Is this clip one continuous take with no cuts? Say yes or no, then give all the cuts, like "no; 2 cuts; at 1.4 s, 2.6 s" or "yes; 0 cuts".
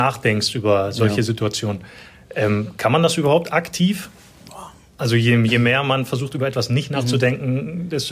yes; 0 cuts